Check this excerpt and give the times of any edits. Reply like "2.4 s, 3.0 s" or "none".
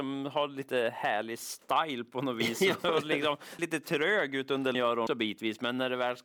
3.6 s, 4.7 s, 5.1 s